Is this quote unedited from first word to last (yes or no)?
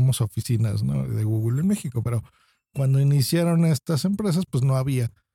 yes